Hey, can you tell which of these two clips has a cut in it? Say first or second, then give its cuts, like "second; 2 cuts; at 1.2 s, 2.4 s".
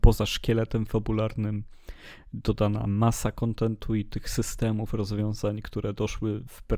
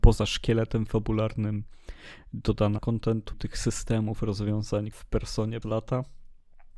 second; 4 cuts; at 2.8 s, 3.3 s, 4.9 s, 5.6 s